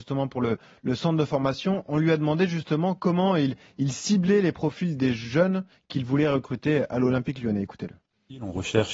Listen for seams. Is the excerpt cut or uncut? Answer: uncut